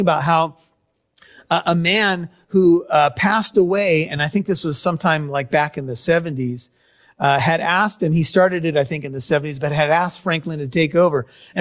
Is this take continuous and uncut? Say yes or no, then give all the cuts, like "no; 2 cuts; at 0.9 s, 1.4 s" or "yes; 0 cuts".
yes; 0 cuts